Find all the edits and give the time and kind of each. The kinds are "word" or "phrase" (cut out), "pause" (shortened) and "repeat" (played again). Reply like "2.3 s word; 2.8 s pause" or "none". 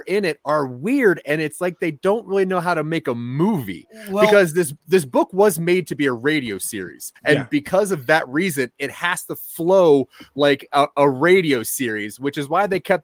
7.2 s pause